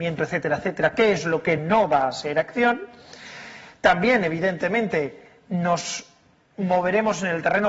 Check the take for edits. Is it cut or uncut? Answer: uncut